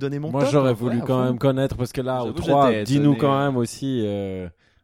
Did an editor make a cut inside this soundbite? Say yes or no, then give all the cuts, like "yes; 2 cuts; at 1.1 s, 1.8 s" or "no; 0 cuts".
no; 0 cuts